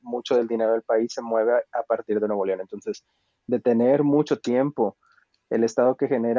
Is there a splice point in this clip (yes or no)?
no